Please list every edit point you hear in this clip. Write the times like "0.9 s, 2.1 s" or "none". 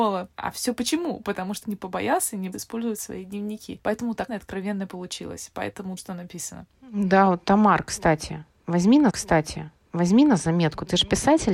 1.6 s, 2.5 s, 4.3 s, 6.0 s, 6.7 s, 9.1 s